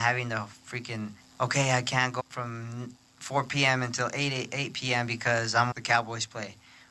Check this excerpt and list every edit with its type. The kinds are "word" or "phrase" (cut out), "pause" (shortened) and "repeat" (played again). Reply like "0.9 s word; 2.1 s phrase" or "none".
1.2 s pause; 2.2 s word; 5.7 s word